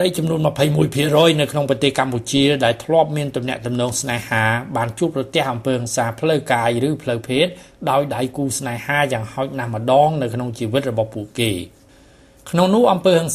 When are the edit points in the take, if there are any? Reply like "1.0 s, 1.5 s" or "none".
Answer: none